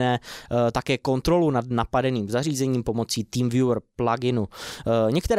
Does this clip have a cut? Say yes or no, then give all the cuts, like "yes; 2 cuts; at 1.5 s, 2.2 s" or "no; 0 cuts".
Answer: no; 0 cuts